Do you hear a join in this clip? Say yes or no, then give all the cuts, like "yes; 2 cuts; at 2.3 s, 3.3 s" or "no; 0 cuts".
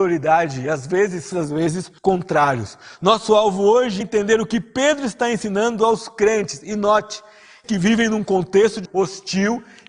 yes; 5 cuts; at 1.3 s, 2.0 s, 4.0 s, 7.6 s, 8.8 s